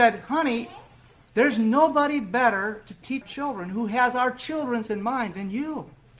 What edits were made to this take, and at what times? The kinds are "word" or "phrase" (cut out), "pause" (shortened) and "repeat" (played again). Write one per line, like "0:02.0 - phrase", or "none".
0:03.2 - word
0:04.9 - word